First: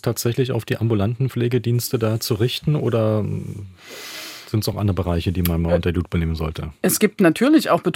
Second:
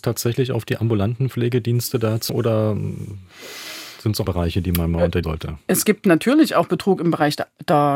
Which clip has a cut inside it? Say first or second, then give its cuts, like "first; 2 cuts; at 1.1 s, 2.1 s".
second; 3 cuts; at 2.3 s, 4.3 s, 5.2 s